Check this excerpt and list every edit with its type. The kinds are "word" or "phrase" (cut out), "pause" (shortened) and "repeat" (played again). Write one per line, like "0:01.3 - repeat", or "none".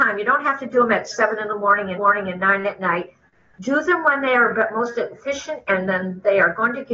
0:02.0 - repeat